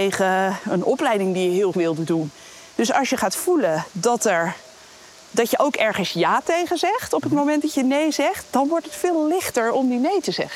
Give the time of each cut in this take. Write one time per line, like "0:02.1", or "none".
0:01.7

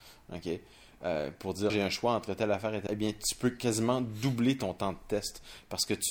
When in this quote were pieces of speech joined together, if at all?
0:01.7
0:02.9

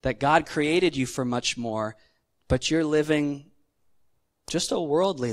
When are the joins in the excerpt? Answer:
none

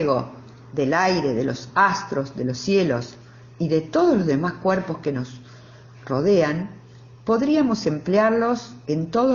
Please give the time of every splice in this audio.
none

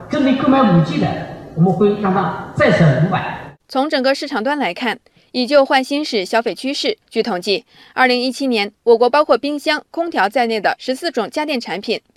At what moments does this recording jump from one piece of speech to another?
0:07.0

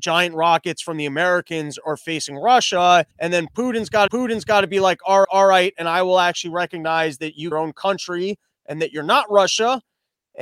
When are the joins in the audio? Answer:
0:03.1
0:04.1
0:05.2
0:07.5

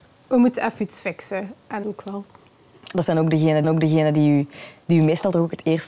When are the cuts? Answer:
0:01.8
0:03.1
0:03.6

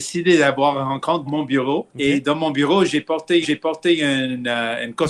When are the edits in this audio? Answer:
0:01.3
0:01.9
0:03.4

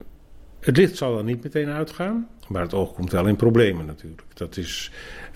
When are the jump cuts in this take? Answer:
0:02.4

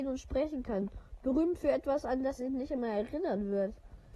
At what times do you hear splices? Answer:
0:02.4

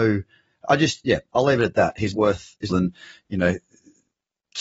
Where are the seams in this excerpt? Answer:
0:02.1
0:02.7

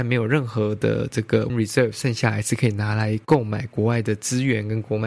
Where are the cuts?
0:01.5

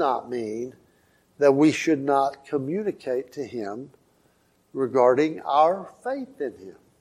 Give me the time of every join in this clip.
none

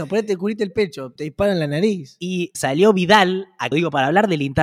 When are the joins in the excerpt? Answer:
0:01.2
0:02.5
0:03.7

